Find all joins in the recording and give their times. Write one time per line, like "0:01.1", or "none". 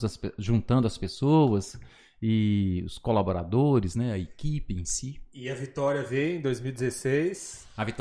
none